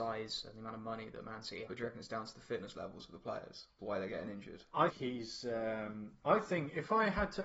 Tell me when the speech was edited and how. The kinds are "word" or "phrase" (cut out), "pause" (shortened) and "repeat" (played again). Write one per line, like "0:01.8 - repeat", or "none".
0:01.7 - word
0:03.8 - word
0:04.9 - word